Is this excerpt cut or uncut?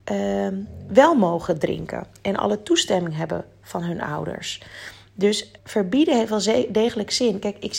cut